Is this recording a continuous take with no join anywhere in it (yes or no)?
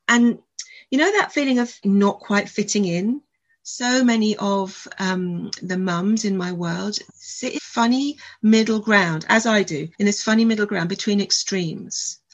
no